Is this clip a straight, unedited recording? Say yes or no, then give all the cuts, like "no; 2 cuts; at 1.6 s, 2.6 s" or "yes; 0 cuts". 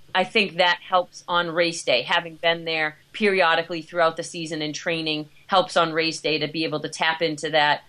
no; 1 cut; at 3.0 s